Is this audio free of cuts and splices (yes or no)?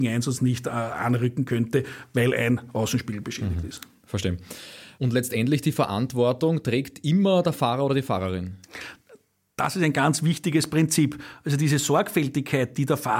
yes